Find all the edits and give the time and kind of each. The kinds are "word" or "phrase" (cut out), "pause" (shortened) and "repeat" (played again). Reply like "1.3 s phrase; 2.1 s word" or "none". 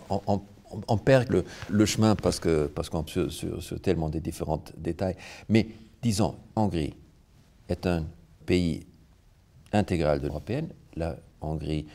1.3 s word; 1.7 s word; 2.7 s word; 3.1 s word; 6.6 s word; 8.4 s word; 10.3 s word